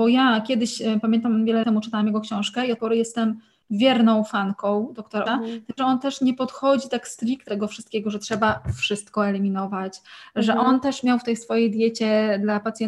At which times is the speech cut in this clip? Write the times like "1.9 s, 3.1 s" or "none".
1.6 s, 2.8 s, 5.3 s, 5.8 s, 7.5 s